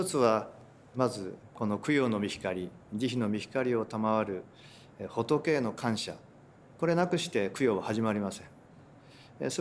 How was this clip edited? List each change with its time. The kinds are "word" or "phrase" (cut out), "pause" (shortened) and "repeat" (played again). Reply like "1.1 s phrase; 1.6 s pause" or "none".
none